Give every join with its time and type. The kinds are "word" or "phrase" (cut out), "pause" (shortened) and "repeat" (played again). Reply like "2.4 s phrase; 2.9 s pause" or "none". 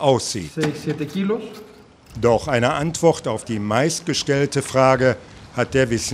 none